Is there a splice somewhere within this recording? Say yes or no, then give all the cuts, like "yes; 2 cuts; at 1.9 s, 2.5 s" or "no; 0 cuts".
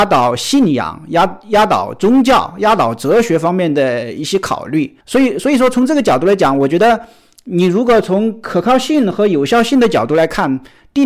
yes; 1 cut; at 5.0 s